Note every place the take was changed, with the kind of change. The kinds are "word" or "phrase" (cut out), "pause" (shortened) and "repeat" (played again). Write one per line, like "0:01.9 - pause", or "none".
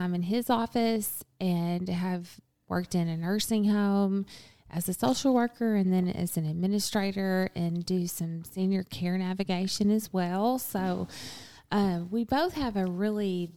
none